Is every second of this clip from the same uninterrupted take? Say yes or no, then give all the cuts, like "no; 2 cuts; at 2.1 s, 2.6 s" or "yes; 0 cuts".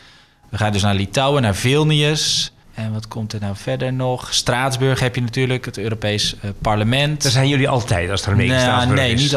no; 1 cut; at 2.6 s